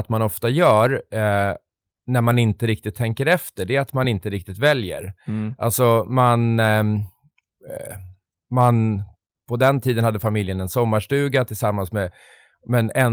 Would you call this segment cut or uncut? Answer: uncut